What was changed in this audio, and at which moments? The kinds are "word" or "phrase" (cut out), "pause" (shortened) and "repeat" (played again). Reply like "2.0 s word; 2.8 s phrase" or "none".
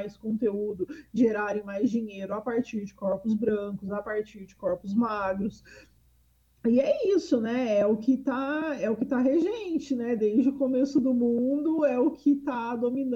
1.2 s word